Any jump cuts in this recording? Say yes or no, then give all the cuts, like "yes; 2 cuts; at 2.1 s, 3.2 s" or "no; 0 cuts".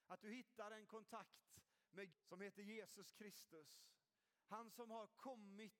yes; 1 cut; at 2.1 s